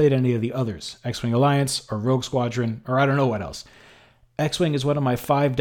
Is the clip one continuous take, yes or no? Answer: yes